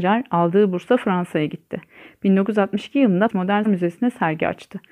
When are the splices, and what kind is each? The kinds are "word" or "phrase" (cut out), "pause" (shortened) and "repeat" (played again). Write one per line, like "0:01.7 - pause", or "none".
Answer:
0:03.3 - word
0:03.6 - word